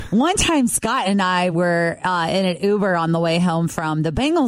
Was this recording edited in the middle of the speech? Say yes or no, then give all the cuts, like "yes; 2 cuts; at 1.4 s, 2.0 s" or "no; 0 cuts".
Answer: no; 0 cuts